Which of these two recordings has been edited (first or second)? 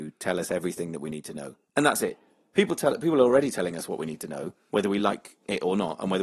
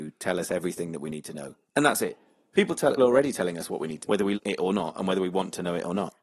second